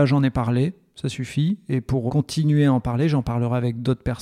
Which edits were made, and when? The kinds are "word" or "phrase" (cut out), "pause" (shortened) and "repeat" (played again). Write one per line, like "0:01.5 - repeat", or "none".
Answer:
0:02.1 - word